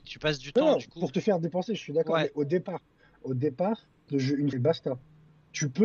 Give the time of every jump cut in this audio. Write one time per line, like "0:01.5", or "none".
0:04.1
0:04.5